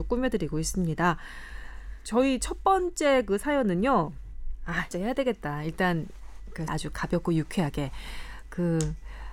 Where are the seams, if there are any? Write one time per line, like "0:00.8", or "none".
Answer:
0:04.9
0:06.7

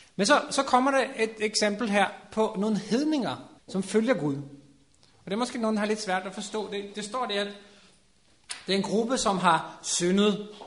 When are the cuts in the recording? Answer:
0:03.6

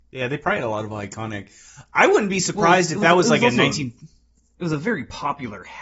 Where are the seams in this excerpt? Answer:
none

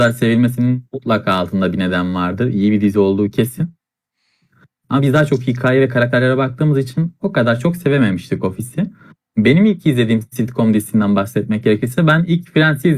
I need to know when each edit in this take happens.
none

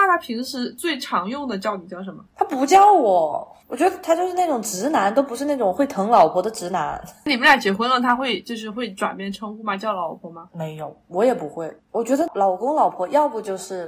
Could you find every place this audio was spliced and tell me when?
0:02.3
0:11.8

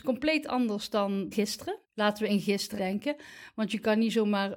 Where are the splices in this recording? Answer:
0:01.3
0:01.8
0:02.3
0:02.8

